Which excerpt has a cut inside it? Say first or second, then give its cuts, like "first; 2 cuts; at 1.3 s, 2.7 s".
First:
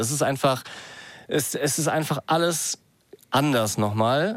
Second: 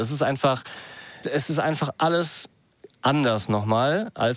second; 1 cut; at 1.2 s